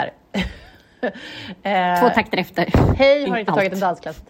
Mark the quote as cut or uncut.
uncut